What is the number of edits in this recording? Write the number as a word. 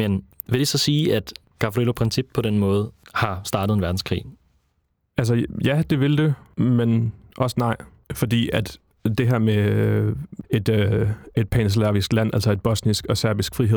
one